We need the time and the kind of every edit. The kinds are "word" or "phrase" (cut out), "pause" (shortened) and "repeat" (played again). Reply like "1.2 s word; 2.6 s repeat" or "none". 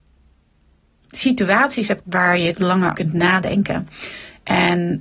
2.0 s phrase; 2.5 s word; 2.9 s word